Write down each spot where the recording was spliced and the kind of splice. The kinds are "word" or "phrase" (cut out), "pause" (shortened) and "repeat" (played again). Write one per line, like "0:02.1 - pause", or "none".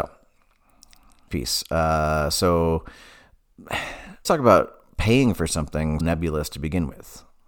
0:01.3 - word
0:04.2 - word
0:06.0 - word